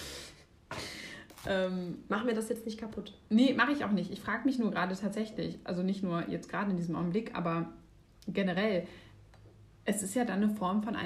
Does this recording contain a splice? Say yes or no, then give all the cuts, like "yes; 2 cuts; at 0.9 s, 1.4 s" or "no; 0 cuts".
no; 0 cuts